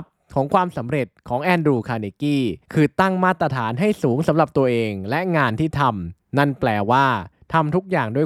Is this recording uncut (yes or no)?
no